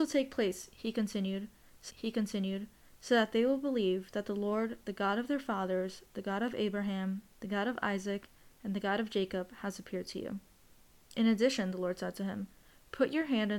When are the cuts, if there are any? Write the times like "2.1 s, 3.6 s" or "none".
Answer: 1.9 s